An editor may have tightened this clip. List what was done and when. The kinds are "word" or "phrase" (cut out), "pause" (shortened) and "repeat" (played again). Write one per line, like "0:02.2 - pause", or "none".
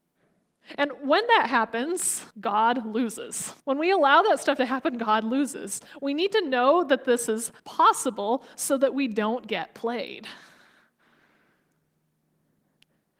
0:02.3 - pause
0:03.6 - pause
0:07.6 - pause